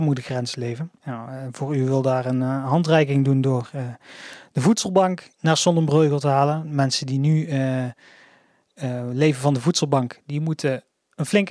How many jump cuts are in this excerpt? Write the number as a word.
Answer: two